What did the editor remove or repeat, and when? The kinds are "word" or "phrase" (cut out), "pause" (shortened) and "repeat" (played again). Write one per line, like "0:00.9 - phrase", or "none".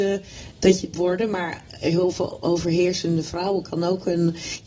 0:00.9 - word